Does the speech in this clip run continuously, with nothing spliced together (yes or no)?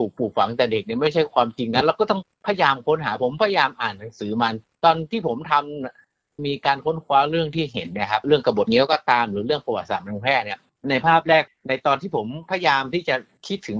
yes